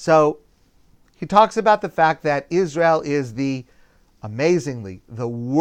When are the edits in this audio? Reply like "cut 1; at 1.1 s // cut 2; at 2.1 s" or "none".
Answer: none